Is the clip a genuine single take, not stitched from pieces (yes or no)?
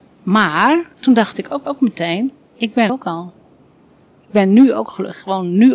no